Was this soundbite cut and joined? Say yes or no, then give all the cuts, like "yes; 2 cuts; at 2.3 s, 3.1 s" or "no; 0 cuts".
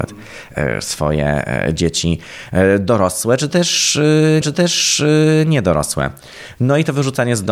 yes; 1 cut; at 4.4 s